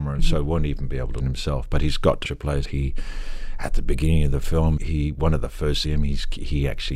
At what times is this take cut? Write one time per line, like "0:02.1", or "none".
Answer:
0:01.2
0:02.2
0:02.6
0:04.8
0:05.8